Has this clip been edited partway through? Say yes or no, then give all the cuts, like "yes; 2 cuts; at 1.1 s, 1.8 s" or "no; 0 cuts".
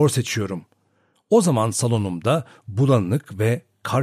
no; 0 cuts